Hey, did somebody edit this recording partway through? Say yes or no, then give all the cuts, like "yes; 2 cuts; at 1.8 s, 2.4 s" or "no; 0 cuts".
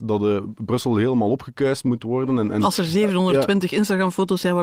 no; 0 cuts